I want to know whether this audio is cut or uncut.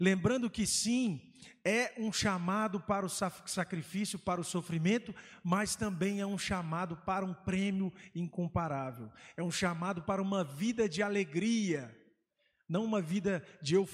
uncut